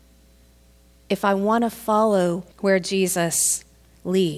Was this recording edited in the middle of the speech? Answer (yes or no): yes